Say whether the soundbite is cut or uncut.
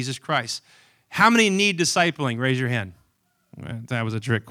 uncut